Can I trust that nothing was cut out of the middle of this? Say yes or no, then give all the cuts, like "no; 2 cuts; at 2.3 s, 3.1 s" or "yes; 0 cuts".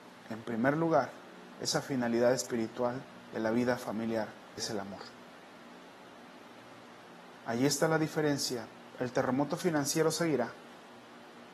no; 1 cut; at 4.6 s